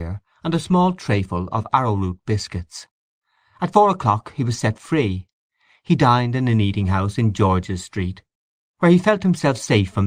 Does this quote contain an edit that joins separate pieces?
no; 0 cuts

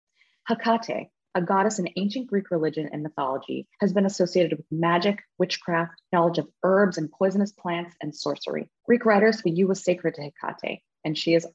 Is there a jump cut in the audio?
yes; 4 cuts; at 3.7 s, 6.1 s, 8.8 s, 9.4 s

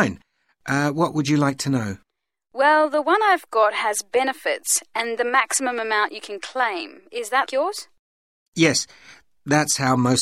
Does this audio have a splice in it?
yes; 2 cuts; at 5.2 s, 7.5 s

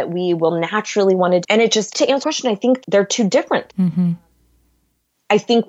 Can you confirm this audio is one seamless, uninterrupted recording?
no; 5 cuts; at 1.4 s, 1.9 s, 2.2 s, 2.8 s, 3.7 s

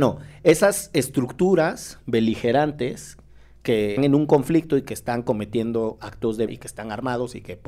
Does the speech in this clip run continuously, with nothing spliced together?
no; 2 cuts; at 4.0 s, 6.5 s

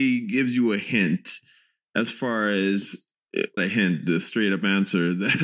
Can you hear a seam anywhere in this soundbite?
yes; 1 cut; at 3.6 s

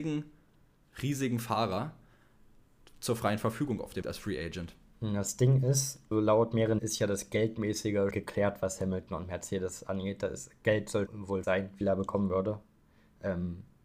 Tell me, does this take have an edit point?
yes; 7 cuts; at 4.0 s, 6.1 s, 6.8 s, 8.1 s, 11.1 s, 11.4 s, 11.8 s

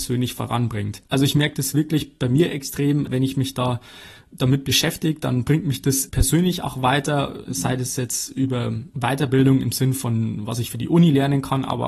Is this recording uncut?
yes; 0 cuts

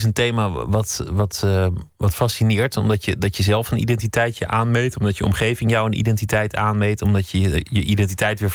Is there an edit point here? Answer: no; 0 cuts

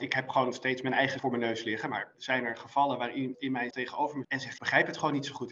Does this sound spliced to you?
yes; 6 cuts; at 1.2 s, 2.1 s, 3.3 s, 3.7 s, 4.2 s, 4.6 s

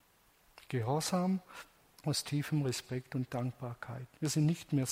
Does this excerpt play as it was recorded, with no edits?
yes; 0 cuts

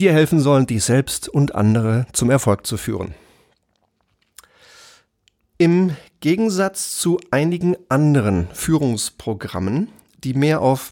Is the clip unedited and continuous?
yes; 0 cuts

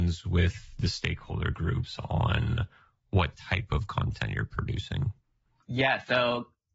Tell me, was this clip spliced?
no; 0 cuts

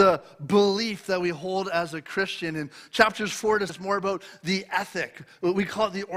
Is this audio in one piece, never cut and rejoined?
no; 1 cut; at 3.7 s

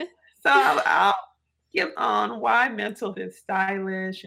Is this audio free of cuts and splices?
no; 2 cuts; at 2.0 s, 3.1 s

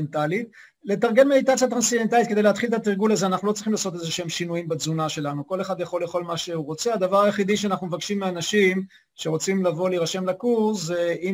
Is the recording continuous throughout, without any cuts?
yes; 0 cuts

